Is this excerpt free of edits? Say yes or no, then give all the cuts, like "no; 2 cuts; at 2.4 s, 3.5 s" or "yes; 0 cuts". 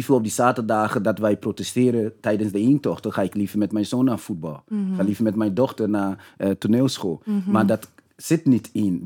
yes; 0 cuts